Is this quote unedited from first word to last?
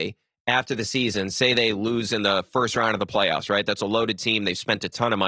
yes; 0 cuts

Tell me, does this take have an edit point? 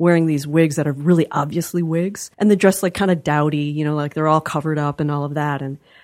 yes; 1 cut; at 2.3 s

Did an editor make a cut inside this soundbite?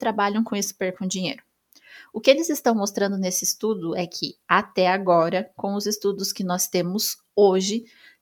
no; 0 cuts

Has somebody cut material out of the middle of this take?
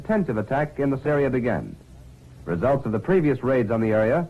yes; 1 cut; at 1.0 s

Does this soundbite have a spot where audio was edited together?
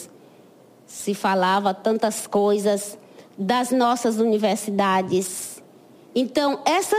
no; 0 cuts

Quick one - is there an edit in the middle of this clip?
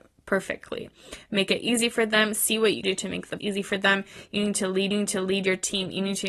yes; 3 cuts; at 2.8 s, 3.4 s, 4.9 s

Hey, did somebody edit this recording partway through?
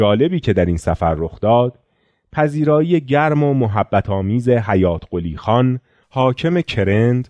no; 0 cuts

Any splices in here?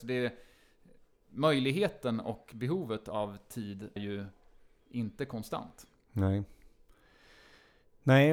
yes; 1 cut; at 4.0 s

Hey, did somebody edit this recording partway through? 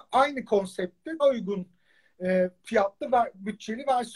yes; 1 cut; at 1.2 s

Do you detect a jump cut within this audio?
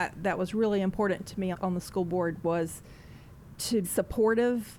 yes; 2 cuts; at 1.5 s, 3.8 s

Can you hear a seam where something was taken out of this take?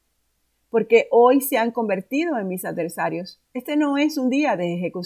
yes; 1 cut; at 3.5 s

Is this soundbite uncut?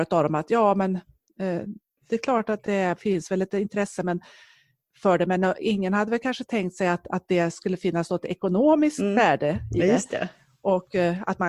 yes; 0 cuts

